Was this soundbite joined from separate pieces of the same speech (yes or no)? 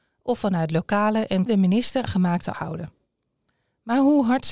yes